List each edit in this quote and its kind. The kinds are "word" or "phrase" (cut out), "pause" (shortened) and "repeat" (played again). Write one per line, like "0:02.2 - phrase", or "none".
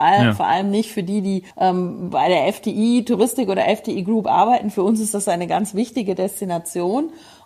0:01.5 - pause